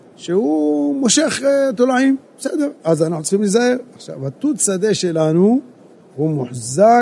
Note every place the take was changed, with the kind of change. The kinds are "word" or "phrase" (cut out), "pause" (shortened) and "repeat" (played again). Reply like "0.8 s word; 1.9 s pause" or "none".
2.2 s pause